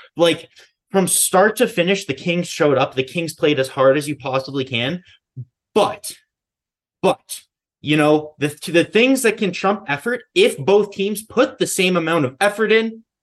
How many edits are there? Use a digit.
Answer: 0